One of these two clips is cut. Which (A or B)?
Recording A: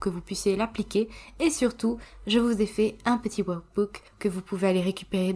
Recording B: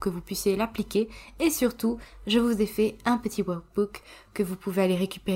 A